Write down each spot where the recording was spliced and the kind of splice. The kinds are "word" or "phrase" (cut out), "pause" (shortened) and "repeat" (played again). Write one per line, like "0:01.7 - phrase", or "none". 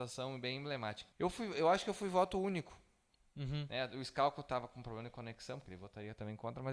0:01.1 - pause